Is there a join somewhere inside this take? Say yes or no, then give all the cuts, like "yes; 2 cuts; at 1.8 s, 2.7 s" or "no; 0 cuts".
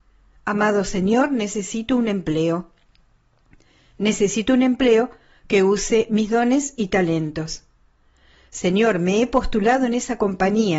no; 0 cuts